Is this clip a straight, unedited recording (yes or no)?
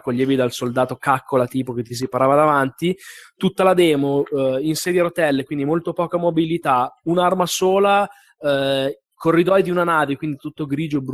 yes